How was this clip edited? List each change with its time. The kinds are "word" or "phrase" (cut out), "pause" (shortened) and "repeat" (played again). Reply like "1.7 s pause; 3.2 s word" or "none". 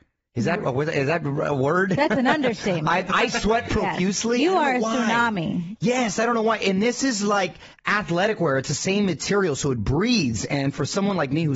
none